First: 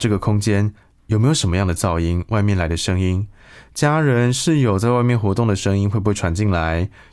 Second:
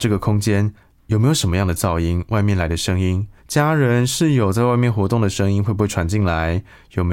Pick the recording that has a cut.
second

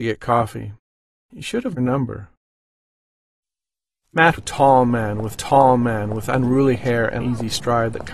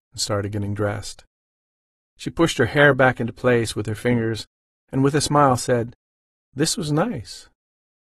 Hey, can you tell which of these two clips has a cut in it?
first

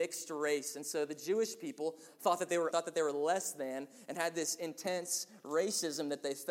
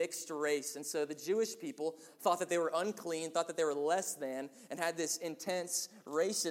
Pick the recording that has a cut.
first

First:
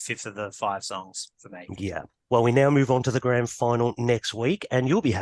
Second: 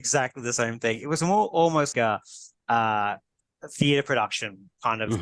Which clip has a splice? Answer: second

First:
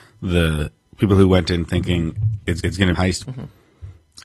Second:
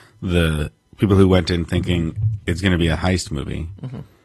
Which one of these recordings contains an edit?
first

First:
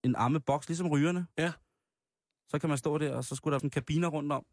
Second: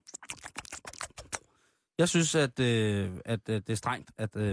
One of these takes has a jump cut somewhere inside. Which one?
first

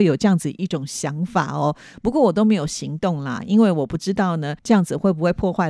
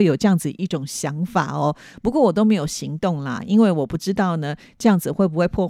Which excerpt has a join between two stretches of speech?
first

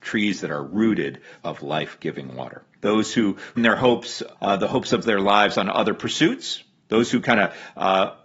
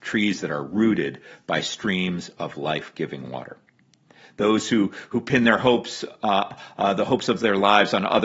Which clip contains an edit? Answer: first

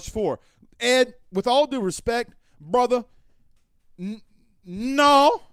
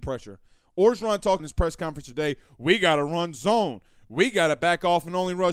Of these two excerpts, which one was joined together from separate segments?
second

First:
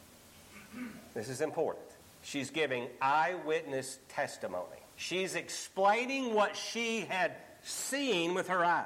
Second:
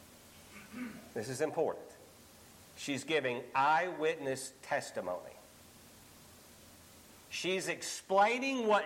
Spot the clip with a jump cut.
first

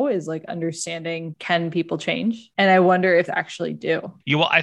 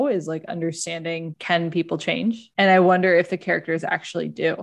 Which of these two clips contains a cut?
first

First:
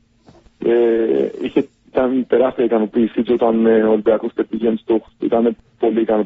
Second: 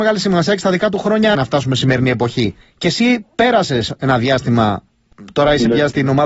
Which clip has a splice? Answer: second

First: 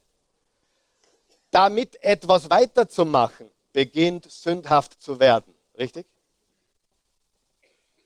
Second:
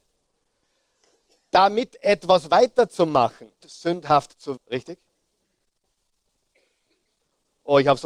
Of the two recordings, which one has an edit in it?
second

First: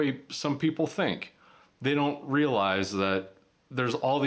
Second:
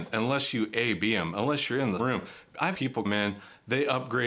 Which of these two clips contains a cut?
second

